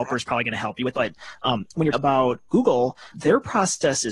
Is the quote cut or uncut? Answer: cut